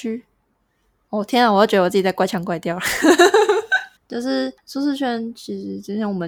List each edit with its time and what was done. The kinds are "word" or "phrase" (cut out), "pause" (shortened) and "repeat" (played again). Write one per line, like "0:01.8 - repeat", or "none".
0:04.0 - phrase
0:04.6 - pause

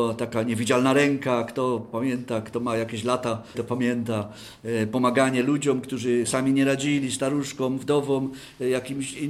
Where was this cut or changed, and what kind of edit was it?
0:03.5 - word
0:06.3 - word

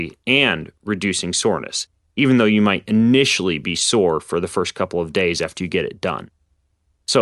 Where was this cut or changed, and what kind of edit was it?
none

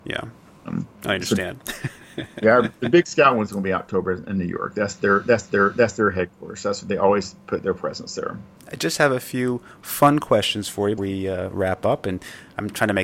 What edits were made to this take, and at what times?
0:00.9 - pause
0:05.4 - repeat
0:11.0 - word

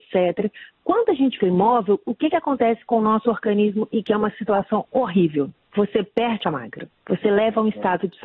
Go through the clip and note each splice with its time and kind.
0:01.4 - word
0:06.4 - word

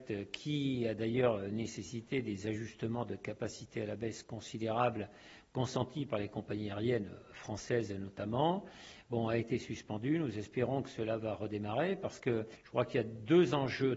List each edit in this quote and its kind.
none

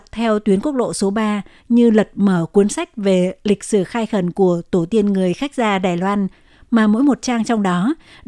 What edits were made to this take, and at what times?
none

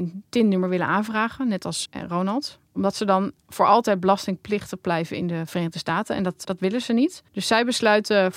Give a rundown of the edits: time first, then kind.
0:01.9 - word
0:03.4 - pause
0:06.4 - word
0:07.3 - pause

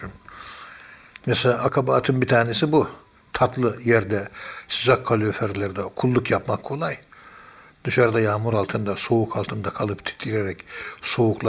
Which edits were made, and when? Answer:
none

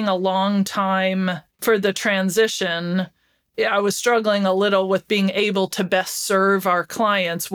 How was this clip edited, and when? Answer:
0:01.5 - pause

